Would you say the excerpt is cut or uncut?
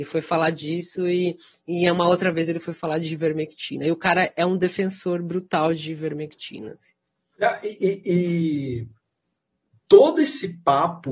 uncut